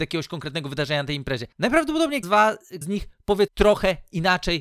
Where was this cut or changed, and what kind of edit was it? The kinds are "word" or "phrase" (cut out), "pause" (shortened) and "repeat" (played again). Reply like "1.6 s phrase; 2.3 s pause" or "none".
2.2 s word; 2.8 s word; 3.5 s word